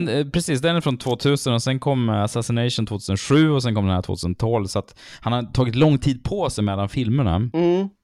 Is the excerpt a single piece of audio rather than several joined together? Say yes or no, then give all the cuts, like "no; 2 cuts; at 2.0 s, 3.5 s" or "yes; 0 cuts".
yes; 0 cuts